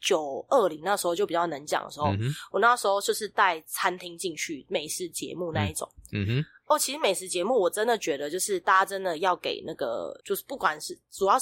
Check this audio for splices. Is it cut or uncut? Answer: uncut